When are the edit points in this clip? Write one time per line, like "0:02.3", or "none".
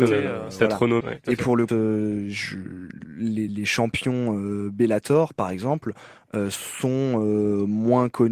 0:01.0
0:01.7
0:03.5